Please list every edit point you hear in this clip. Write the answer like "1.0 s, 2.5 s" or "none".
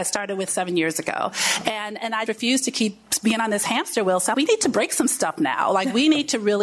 2.3 s, 4.3 s

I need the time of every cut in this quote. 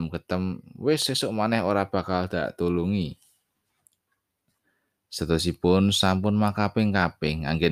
none

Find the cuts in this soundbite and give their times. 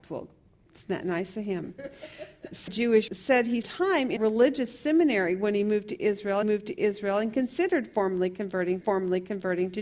2.7 s, 3.1 s, 3.6 s, 4.2 s, 6.4 s, 8.8 s

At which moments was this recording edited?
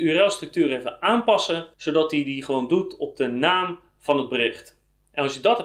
1.7 s

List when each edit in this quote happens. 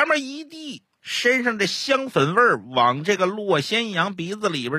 0.9 s

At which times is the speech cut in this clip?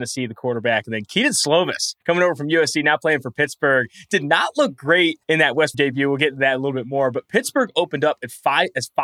2.0 s, 5.2 s, 5.7 s

